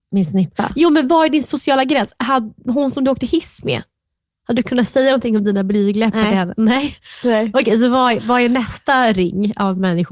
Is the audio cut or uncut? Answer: uncut